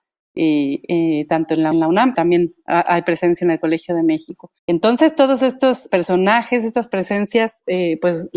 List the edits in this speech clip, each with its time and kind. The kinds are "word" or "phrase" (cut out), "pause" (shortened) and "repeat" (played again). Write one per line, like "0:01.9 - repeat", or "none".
0:01.7 - phrase
0:02.1 - word
0:04.6 - pause
0:05.9 - word